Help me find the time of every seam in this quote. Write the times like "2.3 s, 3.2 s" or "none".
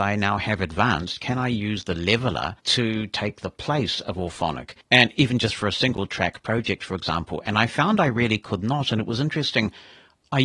2.6 s, 4.8 s

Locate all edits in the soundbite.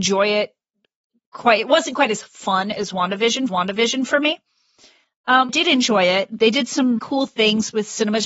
3.5 s, 5.5 s, 7.0 s

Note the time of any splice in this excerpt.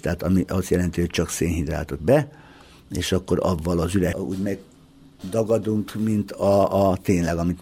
2.0 s, 4.1 s

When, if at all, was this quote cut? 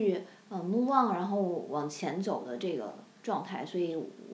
3.1 s

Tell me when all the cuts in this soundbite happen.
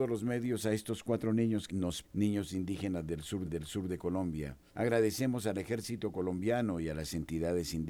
1.7 s, 2.0 s, 3.4 s, 4.7 s

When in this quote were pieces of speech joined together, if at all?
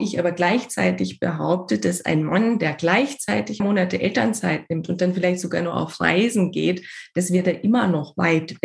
3.6 s

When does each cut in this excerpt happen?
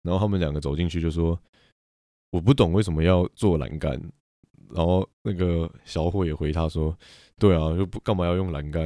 5.8 s

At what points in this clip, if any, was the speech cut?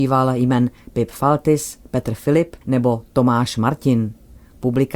2.6 s

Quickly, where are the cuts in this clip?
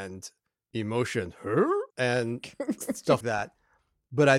1.9 s, 3.2 s

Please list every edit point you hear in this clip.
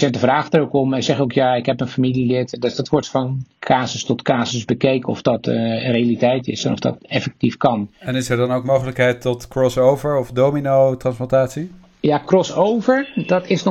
3.5 s, 7.9 s

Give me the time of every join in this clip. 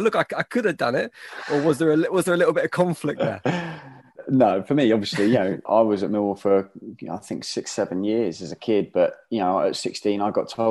none

